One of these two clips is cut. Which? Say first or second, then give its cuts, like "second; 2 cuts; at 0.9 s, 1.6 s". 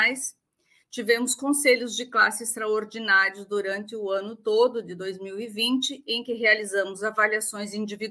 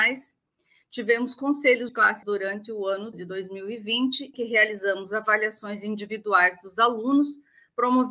second; 4 cuts; at 1.9 s, 2.2 s, 3.1 s, 4.3 s